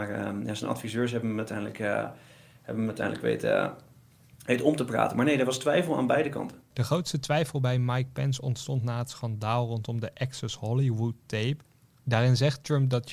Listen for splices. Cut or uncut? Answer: uncut